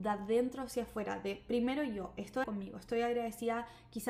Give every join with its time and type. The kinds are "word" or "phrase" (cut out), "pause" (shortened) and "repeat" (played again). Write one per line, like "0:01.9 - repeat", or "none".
0:02.4 - word